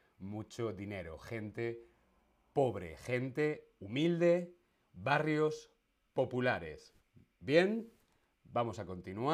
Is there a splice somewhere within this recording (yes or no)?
no